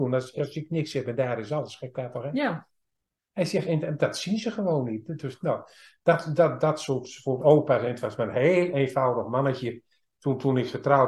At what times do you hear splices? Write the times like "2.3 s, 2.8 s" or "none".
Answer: none